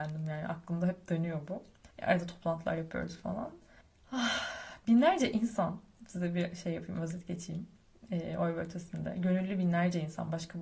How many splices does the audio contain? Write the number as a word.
two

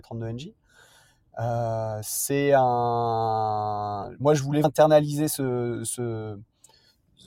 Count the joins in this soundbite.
one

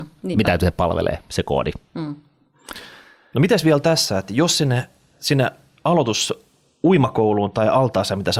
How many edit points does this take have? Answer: zero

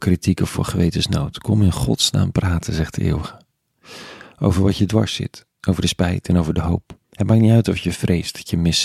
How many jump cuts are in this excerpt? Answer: one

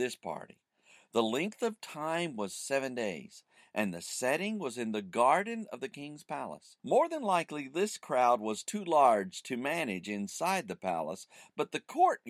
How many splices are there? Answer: one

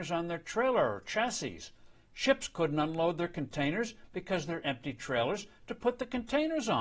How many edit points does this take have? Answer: one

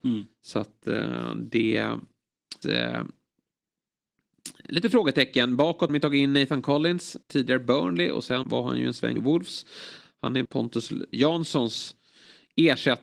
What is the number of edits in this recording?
seven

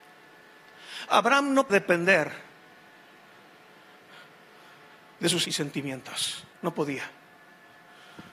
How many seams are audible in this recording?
three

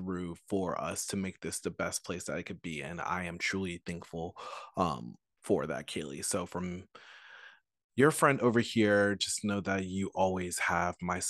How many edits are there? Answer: zero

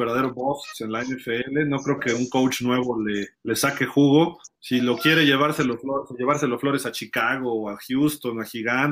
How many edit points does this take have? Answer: two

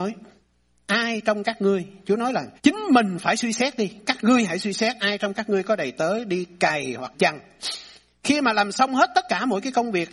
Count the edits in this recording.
two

